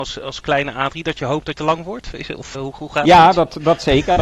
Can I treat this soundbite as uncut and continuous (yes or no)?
no